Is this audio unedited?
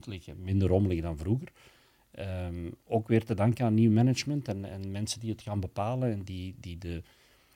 yes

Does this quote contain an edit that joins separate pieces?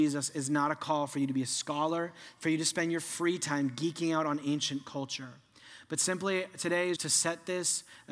yes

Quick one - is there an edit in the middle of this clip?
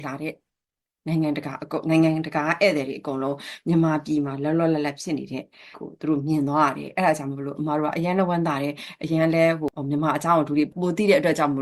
yes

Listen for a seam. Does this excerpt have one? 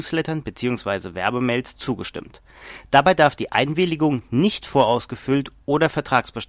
no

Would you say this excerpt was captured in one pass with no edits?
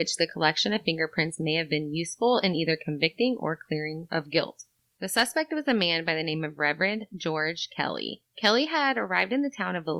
yes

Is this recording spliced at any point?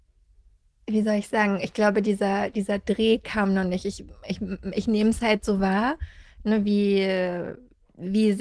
no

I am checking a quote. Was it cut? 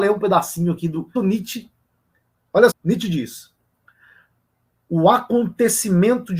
yes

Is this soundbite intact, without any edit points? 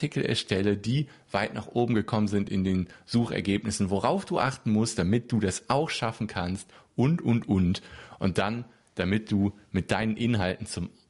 yes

